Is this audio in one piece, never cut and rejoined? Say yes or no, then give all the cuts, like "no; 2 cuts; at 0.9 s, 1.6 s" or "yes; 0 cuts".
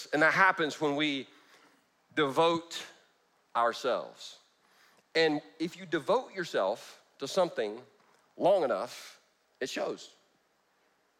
no; 1 cut; at 9.4 s